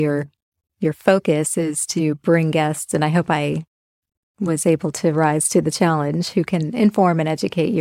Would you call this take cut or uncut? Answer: uncut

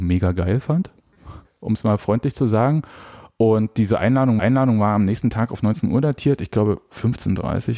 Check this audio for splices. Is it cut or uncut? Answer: cut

